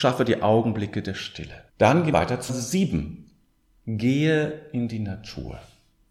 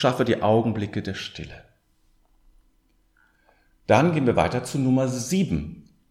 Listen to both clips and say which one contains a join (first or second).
first